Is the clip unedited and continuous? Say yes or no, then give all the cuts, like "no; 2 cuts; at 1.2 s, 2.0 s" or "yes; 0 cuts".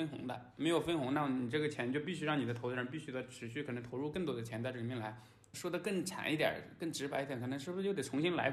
no; 1 cut; at 5.5 s